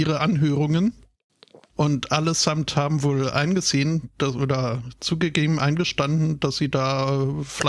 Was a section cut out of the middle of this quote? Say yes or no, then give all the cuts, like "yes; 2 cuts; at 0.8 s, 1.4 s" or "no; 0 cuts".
no; 0 cuts